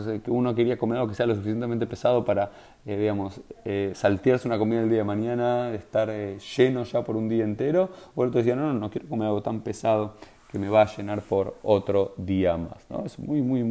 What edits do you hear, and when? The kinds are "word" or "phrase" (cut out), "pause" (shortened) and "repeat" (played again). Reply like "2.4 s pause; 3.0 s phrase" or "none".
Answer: none